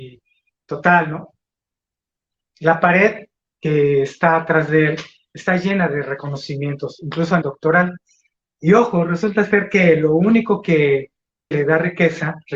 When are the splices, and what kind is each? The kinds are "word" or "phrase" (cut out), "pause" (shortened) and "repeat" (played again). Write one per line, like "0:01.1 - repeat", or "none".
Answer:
0:07.4 - word
0:11.5 - word